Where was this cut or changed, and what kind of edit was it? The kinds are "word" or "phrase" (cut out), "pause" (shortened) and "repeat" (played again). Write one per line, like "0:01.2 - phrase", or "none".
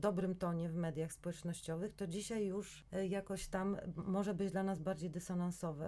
none

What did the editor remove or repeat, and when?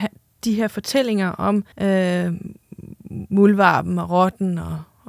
0:01.7 - pause

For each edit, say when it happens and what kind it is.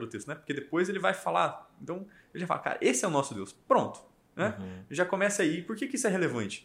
none

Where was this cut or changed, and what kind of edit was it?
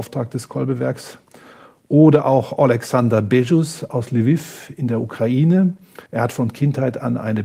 0:06.1 - pause

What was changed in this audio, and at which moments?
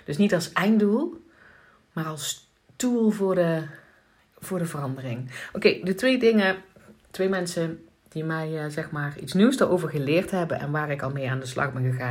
none

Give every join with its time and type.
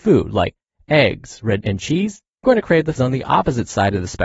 0:01.6 - word
0:02.4 - word
0:03.0 - word

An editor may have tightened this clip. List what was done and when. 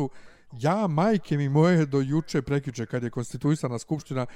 none

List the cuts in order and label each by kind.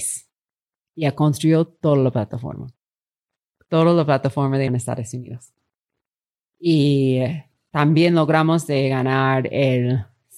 0:04.7 - word

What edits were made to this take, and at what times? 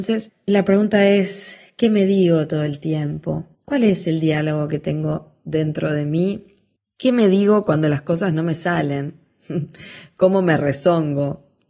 0:03.5 - pause
0:06.8 - pause

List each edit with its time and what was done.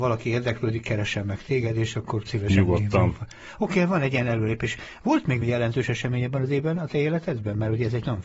0:02.3 - word
0:05.4 - word

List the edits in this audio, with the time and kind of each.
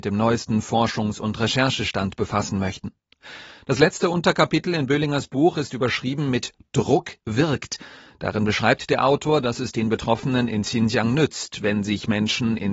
none

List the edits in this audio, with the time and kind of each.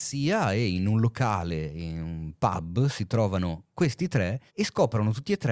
0:04.5 - pause

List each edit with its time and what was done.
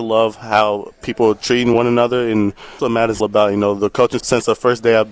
0:02.8 - word
0:03.2 - word
0:04.2 - word

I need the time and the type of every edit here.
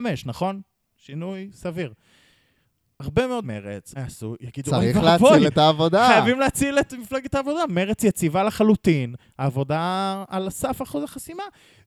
0:03.4 - word
0:04.0 - word
0:06.9 - word

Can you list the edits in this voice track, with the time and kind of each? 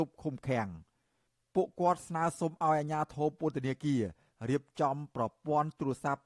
none

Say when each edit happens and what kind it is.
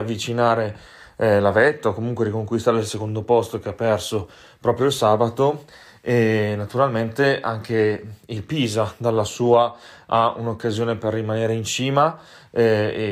none

